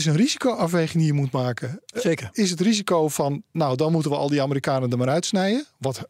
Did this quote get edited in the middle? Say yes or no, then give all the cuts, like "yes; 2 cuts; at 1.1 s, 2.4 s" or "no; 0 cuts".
no; 0 cuts